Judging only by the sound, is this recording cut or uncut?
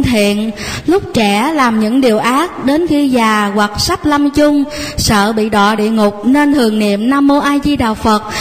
uncut